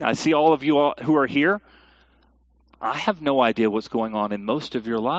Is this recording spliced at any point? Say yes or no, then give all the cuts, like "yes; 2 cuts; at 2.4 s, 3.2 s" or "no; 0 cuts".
no; 0 cuts